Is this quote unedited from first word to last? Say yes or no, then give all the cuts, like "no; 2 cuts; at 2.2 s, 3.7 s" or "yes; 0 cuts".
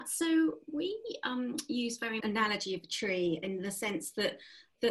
no; 1 cut; at 2.2 s